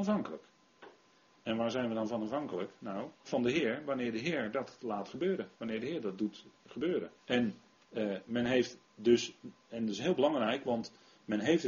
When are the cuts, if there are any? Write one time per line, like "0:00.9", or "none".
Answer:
0:03.1
0:05.5
0:07.2
0:08.8

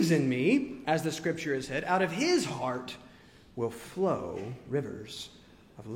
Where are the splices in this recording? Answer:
none

